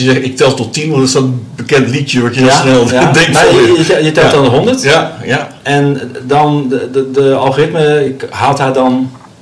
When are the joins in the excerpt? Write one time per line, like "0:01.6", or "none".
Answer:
none